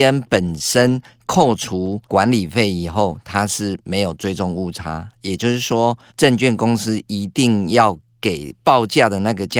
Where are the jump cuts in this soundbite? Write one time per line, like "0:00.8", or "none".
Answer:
0:02.0
0:06.1